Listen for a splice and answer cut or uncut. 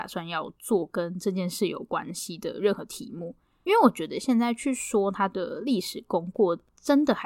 uncut